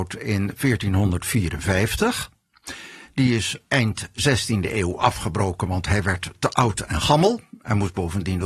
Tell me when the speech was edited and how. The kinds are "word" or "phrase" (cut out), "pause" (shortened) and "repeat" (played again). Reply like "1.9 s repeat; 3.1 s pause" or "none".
none